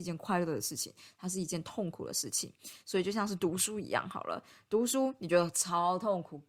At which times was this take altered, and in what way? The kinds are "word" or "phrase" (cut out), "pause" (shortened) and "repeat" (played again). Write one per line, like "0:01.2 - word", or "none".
none